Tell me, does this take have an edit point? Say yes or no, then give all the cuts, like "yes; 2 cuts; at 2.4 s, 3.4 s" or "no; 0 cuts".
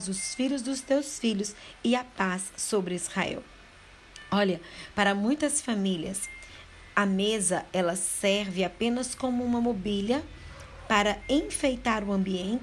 no; 0 cuts